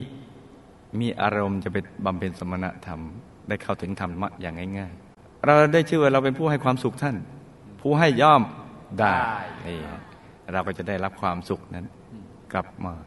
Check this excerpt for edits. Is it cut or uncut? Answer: uncut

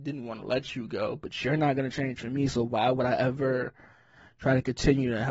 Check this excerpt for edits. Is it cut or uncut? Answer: uncut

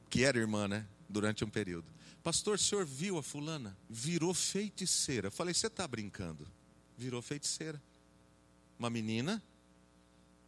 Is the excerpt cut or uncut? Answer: cut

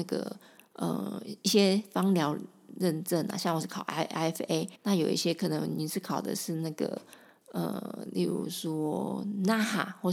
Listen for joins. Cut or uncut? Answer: cut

